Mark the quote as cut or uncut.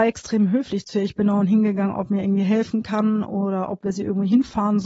uncut